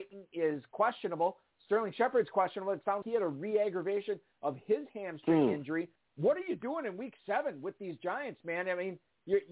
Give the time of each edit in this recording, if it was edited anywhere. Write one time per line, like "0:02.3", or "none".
0:03.0